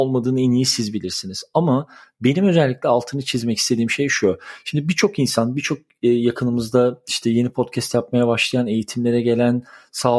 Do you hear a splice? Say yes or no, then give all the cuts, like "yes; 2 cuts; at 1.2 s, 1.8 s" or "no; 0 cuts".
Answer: no; 0 cuts